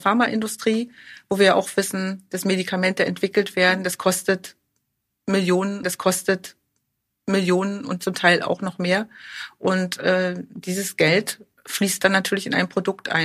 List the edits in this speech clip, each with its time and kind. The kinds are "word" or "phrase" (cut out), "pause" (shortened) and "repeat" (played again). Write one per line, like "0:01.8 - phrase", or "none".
0:05.8 - repeat